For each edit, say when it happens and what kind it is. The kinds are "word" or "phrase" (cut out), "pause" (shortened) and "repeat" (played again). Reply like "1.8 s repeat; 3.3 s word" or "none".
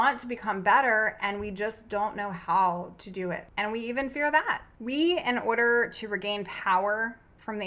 none

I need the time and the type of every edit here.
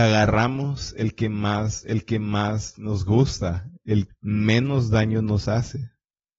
1.8 s repeat; 4.1 s word

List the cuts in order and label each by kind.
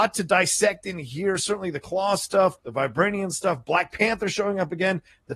2.6 s pause

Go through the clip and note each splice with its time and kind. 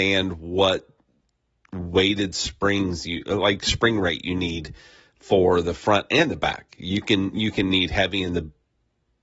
none

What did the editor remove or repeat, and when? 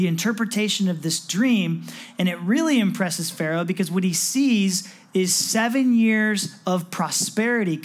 none

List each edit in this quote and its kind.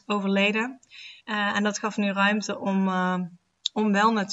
1.2 s pause

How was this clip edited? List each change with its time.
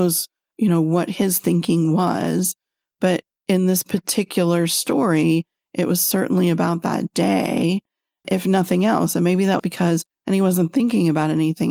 9.6 s phrase; 10.1 s phrase

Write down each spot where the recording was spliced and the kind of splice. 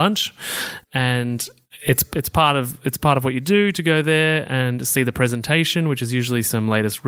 none

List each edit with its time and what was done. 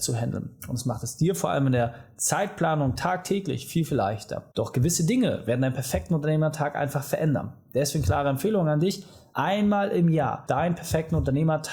none

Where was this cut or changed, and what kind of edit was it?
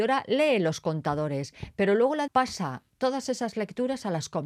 2.3 s word

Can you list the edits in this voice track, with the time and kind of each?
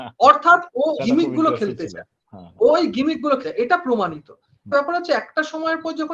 1.0 s word; 3.4 s word; 4.7 s word

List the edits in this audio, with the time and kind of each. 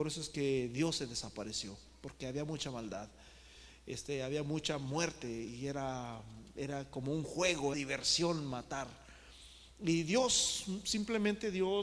7.7 s phrase

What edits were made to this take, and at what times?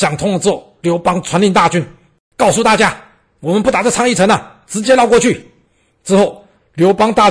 none

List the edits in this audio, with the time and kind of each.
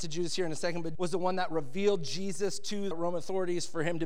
0.9 s word; 2.9 s word

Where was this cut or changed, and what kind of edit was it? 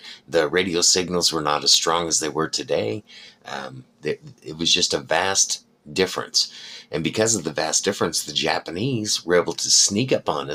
none

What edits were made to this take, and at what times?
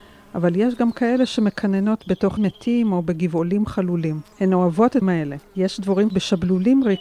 2.4 s word; 4.3 s pause; 5.0 s word; 5.5 s pause; 6.1 s word

